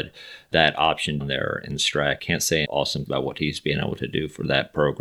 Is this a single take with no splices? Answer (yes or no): no